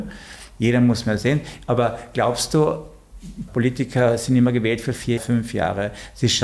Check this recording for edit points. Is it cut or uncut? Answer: cut